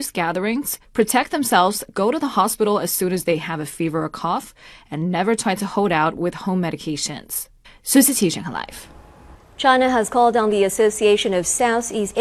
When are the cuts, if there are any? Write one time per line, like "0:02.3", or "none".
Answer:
none